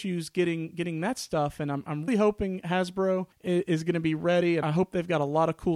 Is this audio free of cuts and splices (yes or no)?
no